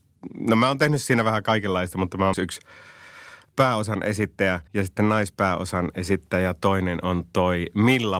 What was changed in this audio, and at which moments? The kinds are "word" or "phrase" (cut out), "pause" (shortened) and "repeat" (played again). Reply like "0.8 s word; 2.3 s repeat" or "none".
2.3 s word; 4.7 s pause